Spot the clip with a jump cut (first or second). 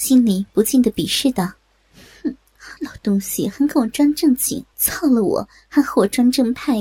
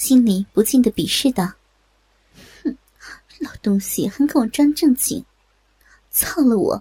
first